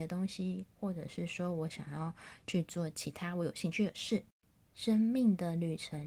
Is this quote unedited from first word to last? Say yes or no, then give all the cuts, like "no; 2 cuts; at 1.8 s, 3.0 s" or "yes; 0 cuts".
yes; 0 cuts